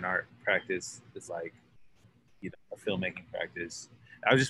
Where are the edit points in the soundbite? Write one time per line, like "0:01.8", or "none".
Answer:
0:01.3
0:02.5